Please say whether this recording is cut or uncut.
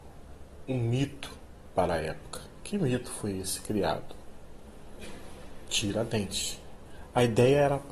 uncut